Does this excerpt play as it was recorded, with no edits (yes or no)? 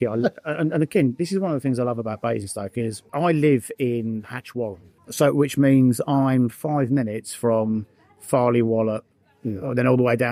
yes